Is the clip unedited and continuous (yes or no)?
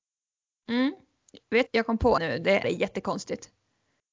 no